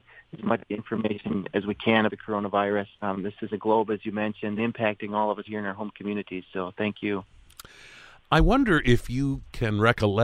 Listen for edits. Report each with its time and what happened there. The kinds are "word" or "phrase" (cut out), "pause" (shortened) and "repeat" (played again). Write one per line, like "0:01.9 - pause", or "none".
0:02.1 - word
0:02.9 - pause
0:03.5 - phrase
0:04.6 - phrase
0:05.5 - word